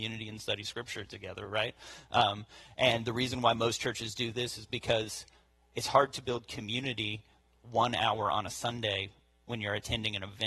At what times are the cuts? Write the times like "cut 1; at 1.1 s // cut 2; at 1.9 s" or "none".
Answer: none